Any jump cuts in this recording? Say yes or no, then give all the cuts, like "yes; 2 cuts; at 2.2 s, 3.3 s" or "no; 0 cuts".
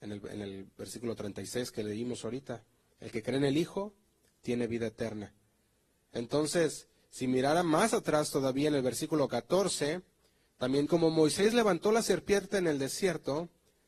yes; 1 cut; at 10.9 s